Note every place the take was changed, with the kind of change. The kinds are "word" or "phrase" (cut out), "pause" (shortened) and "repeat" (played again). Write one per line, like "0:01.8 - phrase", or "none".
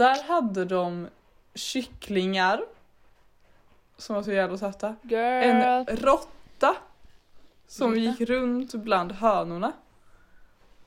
none

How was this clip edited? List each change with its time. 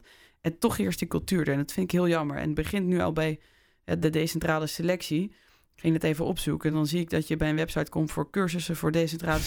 none

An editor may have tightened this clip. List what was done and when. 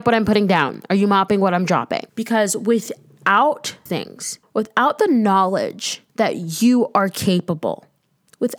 0:02.1 - pause
0:03.9 - word
0:04.4 - pause
0:06.1 - pause

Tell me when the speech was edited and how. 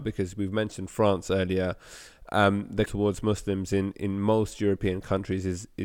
0:02.9 - phrase

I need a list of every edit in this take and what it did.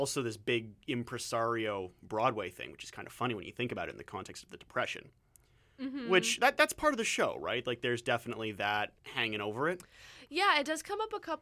0:09.0 - pause

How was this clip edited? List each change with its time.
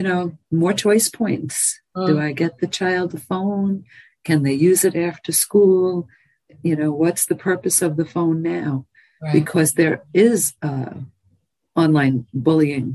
0:10.6 - pause

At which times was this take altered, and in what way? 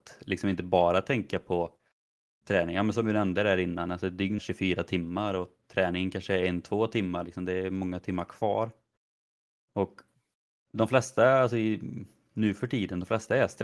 0:04.4 - word

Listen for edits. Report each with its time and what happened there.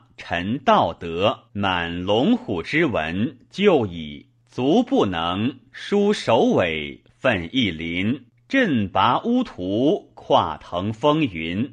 0:01.5 - pause
0:04.4 - pause
0:08.4 - pause

